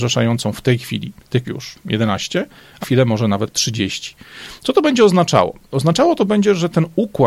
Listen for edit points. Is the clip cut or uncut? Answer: cut